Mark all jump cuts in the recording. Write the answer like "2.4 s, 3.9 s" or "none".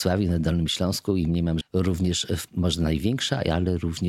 1.6 s, 2.5 s